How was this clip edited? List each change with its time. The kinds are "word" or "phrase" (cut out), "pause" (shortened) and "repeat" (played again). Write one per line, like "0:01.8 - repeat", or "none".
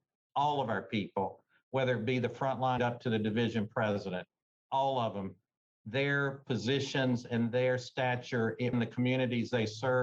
0:02.8 - word
0:08.7 - word